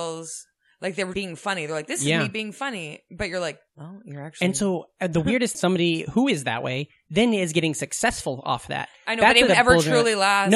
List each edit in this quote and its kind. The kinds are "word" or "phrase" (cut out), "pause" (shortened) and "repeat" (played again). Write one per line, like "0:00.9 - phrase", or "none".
0:01.1 - word
0:03.7 - pause
0:05.5 - phrase
0:09.5 - word